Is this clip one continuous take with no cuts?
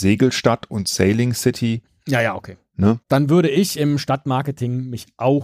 no; 1 cut; at 3.0 s

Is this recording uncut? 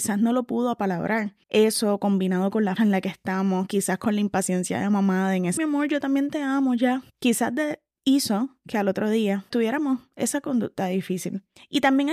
no; 4 cuts; at 1.4 s, 2.8 s, 5.6 s, 9.5 s

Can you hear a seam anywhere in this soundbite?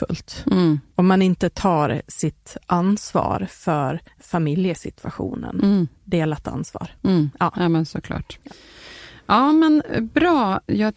yes; 1 cut; at 4.1 s

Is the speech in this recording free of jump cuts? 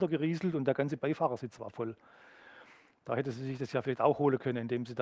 yes; 0 cuts

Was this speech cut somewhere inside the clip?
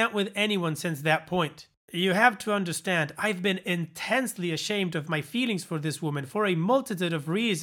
no; 0 cuts

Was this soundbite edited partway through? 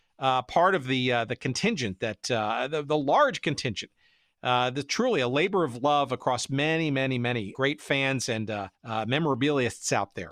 yes; 1 cut; at 8.7 s

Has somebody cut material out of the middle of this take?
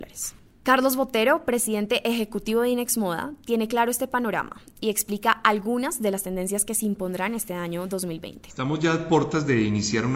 no; 0 cuts

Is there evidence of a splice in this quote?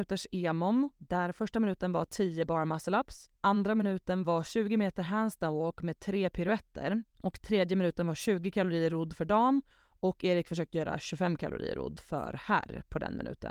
yes; 4 cuts; at 0.9 s, 3.4 s, 7.1 s, 9.7 s

